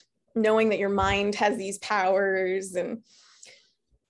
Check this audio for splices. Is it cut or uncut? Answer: uncut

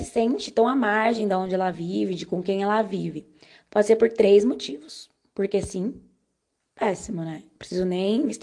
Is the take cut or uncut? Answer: uncut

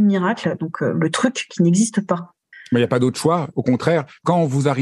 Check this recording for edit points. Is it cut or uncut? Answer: uncut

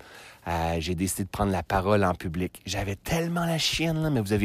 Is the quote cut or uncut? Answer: uncut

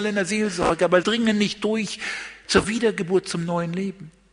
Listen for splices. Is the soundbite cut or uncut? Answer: cut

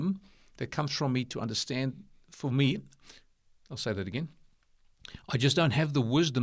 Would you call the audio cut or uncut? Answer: uncut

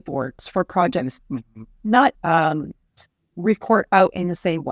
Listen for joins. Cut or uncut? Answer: cut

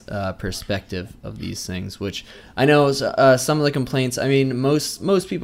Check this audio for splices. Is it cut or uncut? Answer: uncut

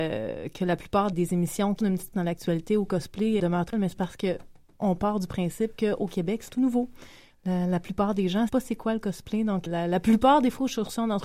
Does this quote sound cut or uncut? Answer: cut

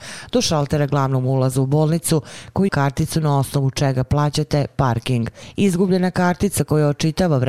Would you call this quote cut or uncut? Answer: cut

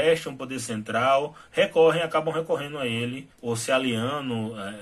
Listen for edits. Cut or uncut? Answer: cut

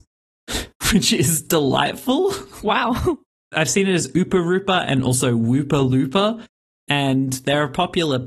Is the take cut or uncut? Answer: uncut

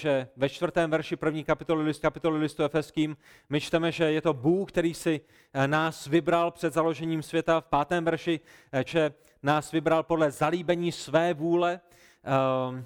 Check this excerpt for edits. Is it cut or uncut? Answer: cut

